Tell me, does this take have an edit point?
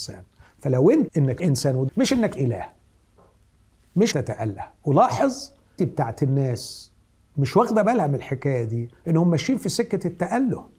yes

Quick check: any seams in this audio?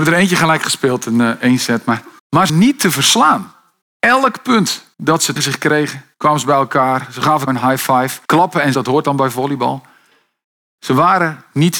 yes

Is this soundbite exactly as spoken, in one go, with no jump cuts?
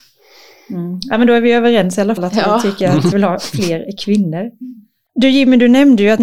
no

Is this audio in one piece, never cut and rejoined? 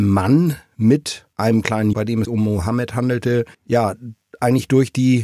no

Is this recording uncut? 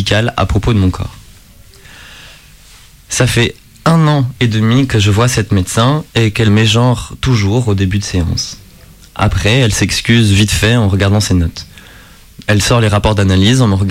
no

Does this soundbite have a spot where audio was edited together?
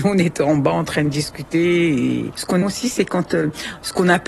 yes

